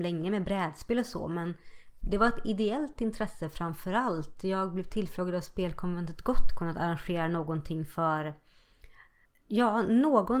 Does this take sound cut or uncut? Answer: uncut